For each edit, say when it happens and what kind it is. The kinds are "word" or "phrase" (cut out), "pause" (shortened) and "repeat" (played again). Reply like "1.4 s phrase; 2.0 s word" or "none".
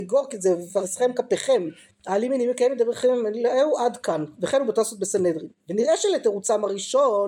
1.9 s pause